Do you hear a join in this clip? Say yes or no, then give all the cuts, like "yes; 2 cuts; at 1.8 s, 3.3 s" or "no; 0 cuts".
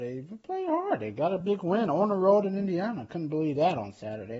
no; 0 cuts